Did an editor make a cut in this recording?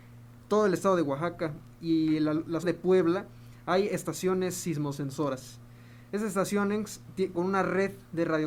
yes; 2 cuts; at 2.6 s, 7.3 s

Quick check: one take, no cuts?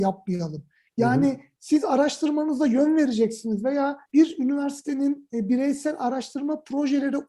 no; 1 cut; at 4.1 s

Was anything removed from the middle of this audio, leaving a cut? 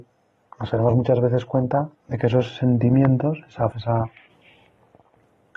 yes; 2 cuts; at 2.0 s, 3.7 s

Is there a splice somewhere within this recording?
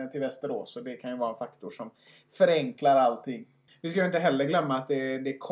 no; 0 cuts

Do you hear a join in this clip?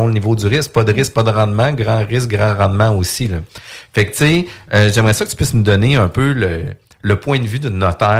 no; 0 cuts

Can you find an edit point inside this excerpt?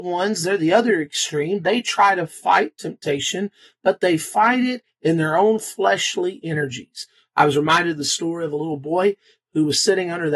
no; 0 cuts

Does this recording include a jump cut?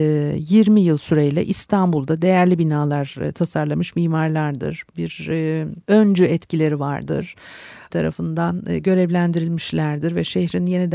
yes; 2 cuts; at 5.8 s, 7.9 s

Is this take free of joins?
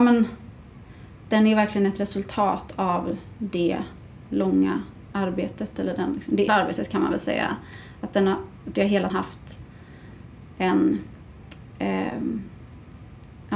no; 2 cuts; at 6.5 s, 9.1 s

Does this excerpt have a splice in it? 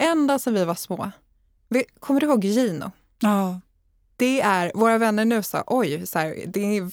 no; 0 cuts

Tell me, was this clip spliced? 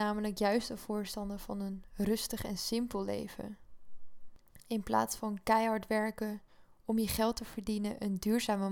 no; 0 cuts

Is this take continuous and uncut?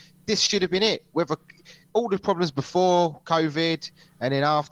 yes; 0 cuts

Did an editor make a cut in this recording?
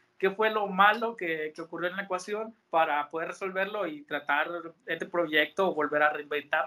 yes; 2 cuts; at 2.6 s, 5.0 s

